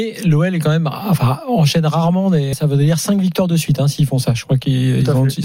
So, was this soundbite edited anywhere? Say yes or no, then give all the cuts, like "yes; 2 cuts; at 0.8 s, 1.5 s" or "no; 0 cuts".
yes; 1 cut; at 2.5 s